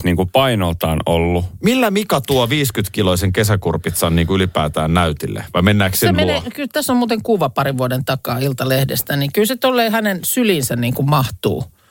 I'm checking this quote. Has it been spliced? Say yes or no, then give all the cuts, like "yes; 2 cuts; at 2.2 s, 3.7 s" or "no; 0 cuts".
no; 0 cuts